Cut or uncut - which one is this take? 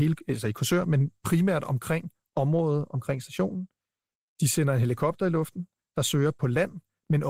uncut